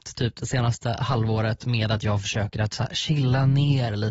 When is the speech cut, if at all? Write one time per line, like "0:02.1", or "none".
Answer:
none